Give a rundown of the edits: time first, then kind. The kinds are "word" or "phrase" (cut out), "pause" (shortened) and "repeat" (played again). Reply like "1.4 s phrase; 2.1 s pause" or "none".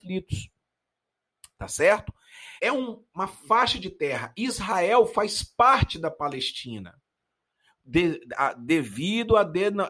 2.6 s pause